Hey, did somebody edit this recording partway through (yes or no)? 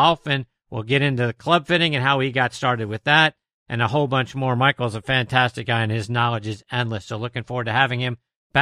no